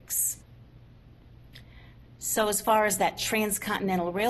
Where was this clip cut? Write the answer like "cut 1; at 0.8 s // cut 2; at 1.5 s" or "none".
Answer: none